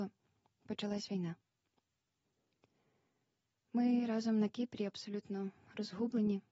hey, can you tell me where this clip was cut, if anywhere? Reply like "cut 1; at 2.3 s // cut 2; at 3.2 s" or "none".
none